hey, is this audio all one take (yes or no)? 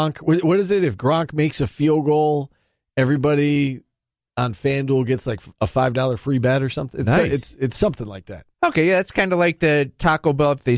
no